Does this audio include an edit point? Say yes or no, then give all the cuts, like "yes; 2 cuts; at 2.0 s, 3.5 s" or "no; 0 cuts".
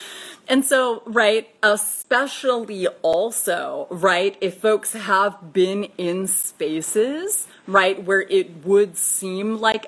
no; 0 cuts